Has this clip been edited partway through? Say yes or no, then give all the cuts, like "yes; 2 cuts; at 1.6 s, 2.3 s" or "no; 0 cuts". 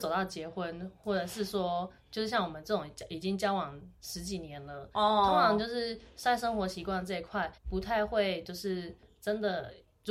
yes; 1 cut; at 7.6 s